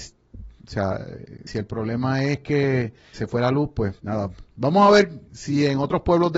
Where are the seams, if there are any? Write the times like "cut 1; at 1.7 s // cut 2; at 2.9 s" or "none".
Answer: cut 1; at 1.5 s // cut 2; at 3.1 s // cut 3; at 4.0 s // cut 4; at 5.3 s